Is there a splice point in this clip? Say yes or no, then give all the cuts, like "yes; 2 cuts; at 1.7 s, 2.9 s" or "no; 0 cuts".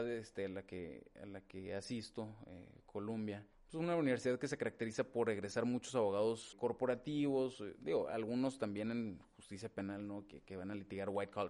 yes; 2 cuts; at 3.5 s, 6.5 s